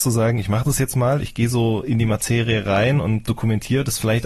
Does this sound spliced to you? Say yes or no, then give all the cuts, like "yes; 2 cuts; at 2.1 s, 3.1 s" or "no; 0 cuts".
yes; 1 cut; at 3.3 s